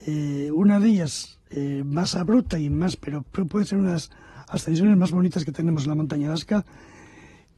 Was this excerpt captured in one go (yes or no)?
yes